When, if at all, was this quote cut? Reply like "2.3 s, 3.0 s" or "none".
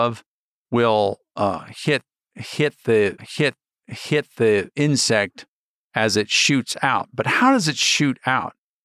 3.2 s